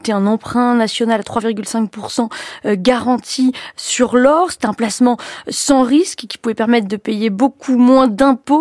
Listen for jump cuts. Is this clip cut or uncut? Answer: uncut